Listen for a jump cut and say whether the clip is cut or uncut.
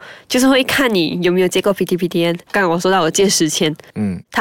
uncut